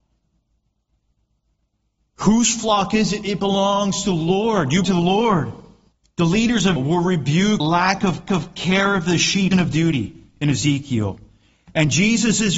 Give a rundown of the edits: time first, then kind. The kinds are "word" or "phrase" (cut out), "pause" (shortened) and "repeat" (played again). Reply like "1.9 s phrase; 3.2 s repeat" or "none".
4.8 s word; 5.9 s pause; 6.8 s word; 7.6 s word; 8.3 s repeat; 9.5 s phrase